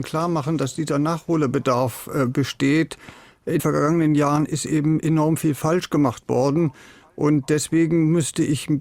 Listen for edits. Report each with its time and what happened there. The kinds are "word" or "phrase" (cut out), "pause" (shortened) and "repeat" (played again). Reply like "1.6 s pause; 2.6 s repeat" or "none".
3.6 s word